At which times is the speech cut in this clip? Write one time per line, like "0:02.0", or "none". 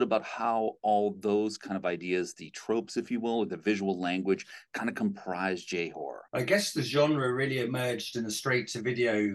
0:06.3